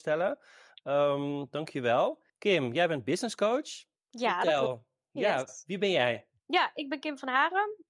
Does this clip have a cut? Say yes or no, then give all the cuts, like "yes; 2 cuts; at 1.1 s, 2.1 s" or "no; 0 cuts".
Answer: yes; 3 cuts; at 2.3 s, 4.0 s, 6.4 s